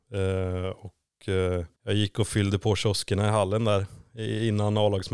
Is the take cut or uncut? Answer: cut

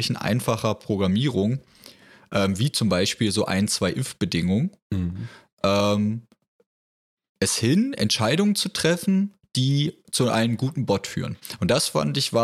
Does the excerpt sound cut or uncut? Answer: uncut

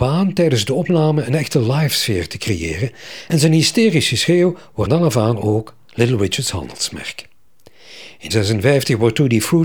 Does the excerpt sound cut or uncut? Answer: cut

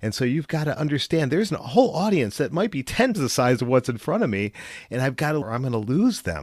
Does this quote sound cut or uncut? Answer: cut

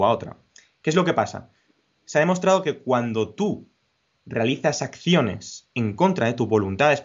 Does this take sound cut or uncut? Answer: uncut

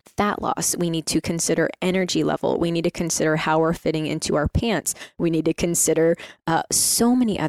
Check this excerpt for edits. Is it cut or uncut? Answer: uncut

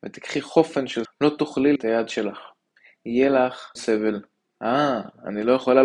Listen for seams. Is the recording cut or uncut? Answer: cut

